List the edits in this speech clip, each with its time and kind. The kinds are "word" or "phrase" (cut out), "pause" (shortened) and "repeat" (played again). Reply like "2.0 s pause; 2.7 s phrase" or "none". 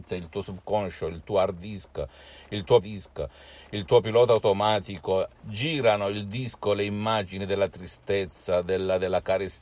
2.8 s repeat; 5.3 s pause